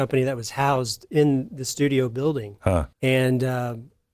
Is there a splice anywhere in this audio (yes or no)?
yes